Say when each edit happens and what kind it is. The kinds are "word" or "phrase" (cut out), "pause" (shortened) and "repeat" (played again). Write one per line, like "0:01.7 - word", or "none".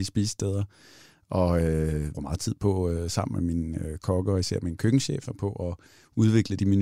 0:02.1 - phrase